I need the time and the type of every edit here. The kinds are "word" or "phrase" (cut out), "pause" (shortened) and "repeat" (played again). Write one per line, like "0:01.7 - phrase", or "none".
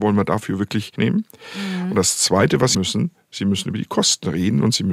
0:01.0 - phrase
0:02.7 - phrase